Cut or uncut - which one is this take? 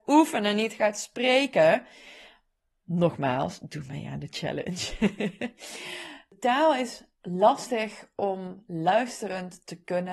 uncut